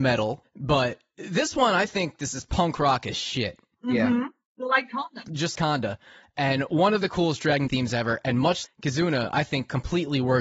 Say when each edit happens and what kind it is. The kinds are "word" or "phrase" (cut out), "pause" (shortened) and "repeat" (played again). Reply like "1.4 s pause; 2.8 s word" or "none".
5.5 s word; 7.7 s word; 8.6 s word